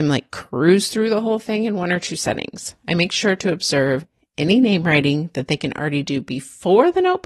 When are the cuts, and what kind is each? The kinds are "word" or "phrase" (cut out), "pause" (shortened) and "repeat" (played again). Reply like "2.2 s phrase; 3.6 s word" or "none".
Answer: none